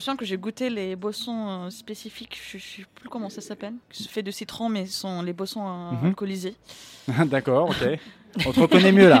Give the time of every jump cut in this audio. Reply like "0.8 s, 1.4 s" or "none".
3.8 s